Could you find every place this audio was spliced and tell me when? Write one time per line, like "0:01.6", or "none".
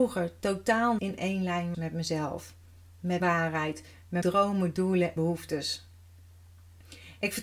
0:01.0
0:01.7
0:03.2
0:04.2
0:05.2